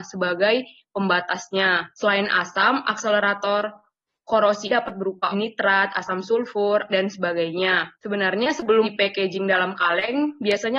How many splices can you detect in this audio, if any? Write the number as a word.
six